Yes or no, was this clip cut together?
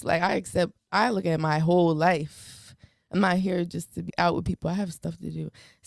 yes